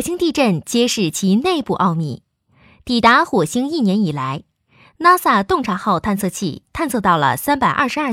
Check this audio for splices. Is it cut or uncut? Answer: uncut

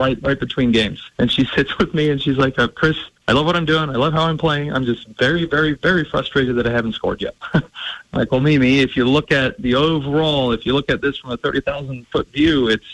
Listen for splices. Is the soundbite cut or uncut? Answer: cut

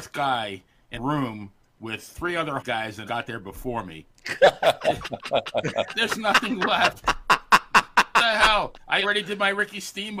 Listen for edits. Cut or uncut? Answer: cut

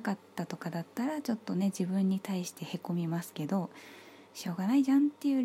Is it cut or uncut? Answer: cut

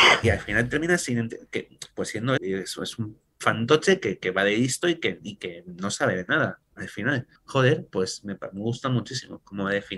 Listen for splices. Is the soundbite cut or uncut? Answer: cut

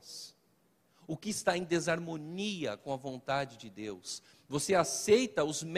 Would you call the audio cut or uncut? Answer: uncut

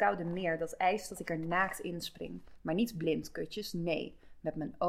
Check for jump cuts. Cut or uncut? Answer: uncut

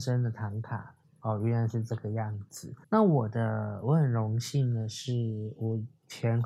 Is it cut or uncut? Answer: cut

